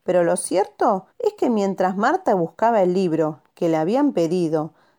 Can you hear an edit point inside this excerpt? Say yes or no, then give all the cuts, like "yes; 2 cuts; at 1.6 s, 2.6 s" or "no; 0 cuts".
yes; 1 cut; at 1.1 s